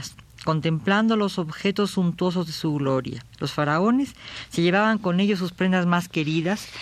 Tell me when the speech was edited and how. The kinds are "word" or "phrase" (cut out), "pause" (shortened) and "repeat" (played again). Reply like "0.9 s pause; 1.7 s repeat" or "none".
3.3 s pause